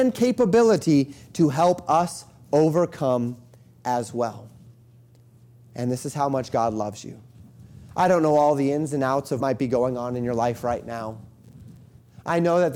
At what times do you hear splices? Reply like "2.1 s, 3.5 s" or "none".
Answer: 9.4 s

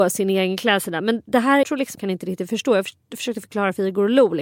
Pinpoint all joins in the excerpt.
1.6 s, 1.9 s

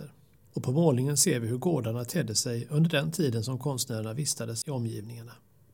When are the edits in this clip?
none

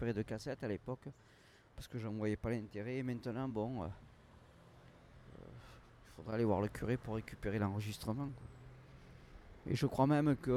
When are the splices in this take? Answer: none

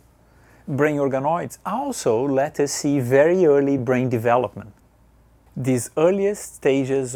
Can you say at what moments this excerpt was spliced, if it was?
none

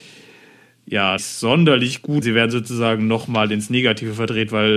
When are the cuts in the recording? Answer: 1.2 s, 2.2 s

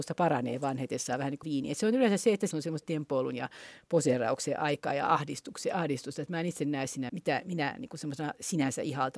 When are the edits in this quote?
1.4 s, 2.5 s, 2.8 s, 7.1 s

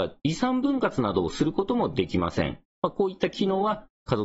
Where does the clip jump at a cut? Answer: 2.7 s

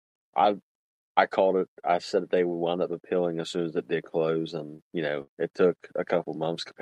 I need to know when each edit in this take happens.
none

